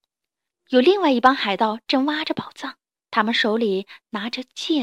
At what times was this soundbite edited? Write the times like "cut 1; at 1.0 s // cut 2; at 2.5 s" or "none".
cut 1; at 3.0 s